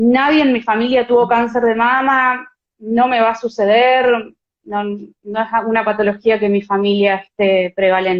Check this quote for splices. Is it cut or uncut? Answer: uncut